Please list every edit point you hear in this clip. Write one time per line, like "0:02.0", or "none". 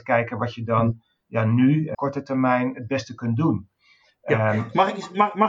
0:01.9